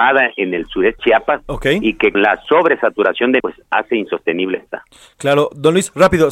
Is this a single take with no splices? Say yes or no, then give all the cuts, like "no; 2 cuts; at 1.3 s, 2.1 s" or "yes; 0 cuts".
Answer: no; 3 cuts; at 1.0 s, 2.1 s, 3.4 s